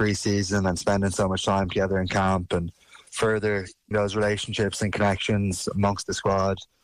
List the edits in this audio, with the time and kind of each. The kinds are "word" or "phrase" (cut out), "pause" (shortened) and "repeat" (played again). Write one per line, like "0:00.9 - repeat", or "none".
0:03.9 - word